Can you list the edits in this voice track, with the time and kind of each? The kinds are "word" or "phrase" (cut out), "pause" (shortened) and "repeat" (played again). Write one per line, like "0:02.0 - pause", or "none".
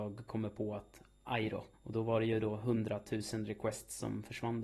0:01.7 - pause